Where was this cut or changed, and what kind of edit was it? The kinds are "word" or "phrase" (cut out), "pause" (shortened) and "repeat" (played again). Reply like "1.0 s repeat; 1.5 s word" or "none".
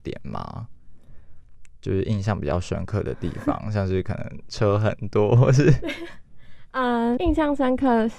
7.2 s word